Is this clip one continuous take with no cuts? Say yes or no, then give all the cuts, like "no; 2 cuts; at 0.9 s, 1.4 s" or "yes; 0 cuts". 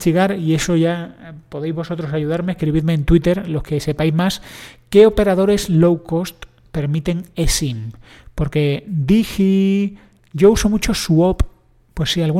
yes; 0 cuts